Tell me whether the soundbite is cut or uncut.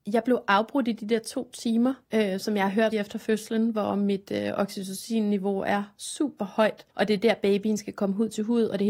cut